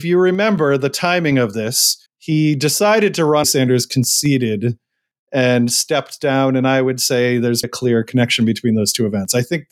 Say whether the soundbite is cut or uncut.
cut